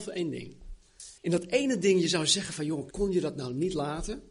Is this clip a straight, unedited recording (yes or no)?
no